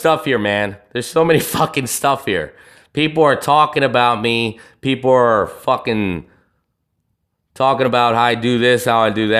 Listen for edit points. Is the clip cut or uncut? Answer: uncut